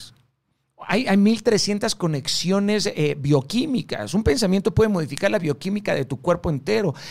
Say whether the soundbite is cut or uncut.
uncut